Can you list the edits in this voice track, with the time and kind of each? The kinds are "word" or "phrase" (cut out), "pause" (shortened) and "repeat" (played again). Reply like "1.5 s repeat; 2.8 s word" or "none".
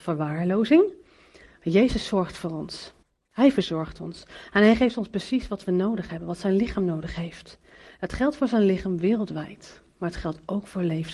3.0 s pause

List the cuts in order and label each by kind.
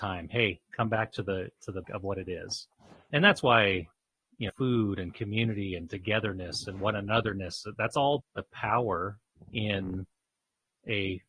1.8 s word; 3.1 s word; 4.5 s word; 8.2 s word

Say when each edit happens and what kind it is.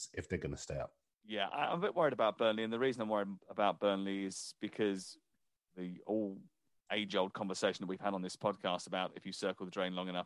none

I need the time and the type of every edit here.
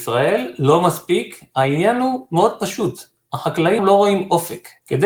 3.8 s word

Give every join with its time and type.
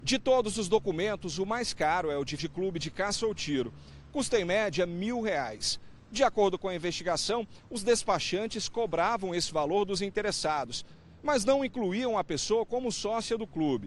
2.4 s word

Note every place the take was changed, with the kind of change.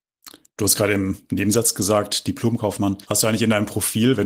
3.0 s pause

